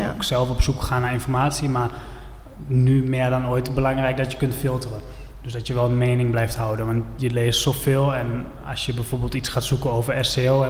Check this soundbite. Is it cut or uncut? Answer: uncut